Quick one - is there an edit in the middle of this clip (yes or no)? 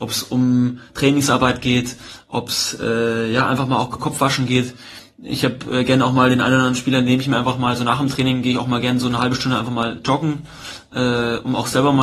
yes